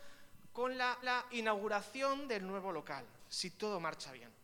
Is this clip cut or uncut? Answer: cut